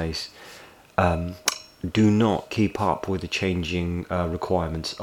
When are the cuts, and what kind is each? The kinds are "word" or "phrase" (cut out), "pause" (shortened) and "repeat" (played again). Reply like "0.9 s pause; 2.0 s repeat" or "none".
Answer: none